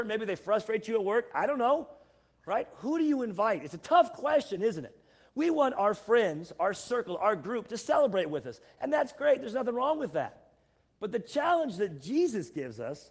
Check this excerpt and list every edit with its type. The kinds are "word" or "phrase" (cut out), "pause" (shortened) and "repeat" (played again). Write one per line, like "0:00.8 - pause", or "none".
none